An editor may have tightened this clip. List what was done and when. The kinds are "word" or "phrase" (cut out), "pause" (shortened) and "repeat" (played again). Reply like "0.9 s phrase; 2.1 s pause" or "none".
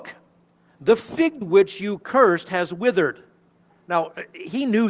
1.4 s word